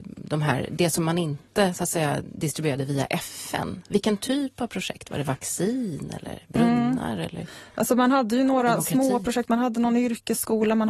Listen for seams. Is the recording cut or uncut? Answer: uncut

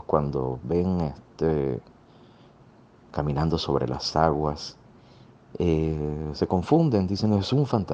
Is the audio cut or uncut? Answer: uncut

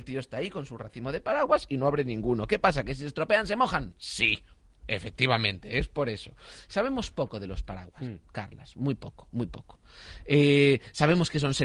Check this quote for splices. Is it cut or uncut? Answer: uncut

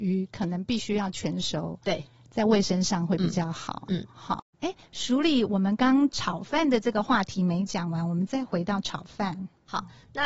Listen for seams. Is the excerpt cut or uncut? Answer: cut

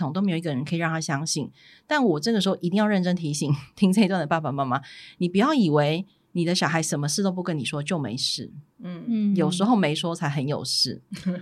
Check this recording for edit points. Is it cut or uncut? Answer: uncut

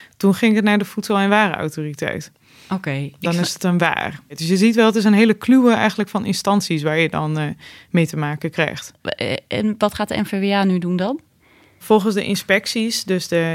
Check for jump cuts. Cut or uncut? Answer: uncut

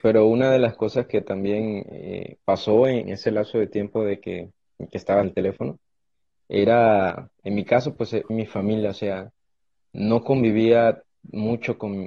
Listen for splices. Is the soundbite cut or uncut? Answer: cut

